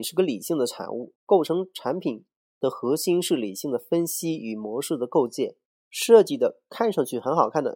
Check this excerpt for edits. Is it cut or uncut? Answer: cut